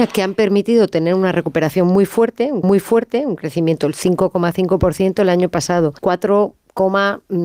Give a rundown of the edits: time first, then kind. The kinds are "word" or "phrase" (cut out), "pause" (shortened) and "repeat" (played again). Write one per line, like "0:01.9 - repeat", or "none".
0:02.6 - repeat
0:06.0 - pause